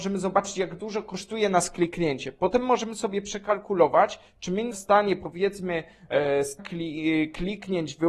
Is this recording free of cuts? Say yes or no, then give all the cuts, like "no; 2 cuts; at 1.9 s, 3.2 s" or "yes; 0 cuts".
no; 2 cuts; at 4.7 s, 6.6 s